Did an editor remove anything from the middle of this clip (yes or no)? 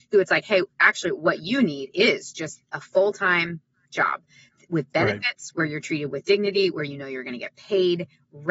no